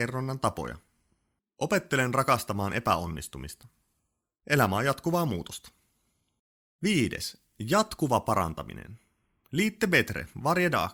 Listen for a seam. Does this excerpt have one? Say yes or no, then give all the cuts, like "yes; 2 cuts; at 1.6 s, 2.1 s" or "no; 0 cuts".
no; 0 cuts